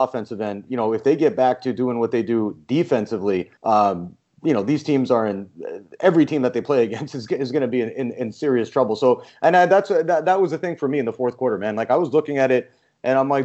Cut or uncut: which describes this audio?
cut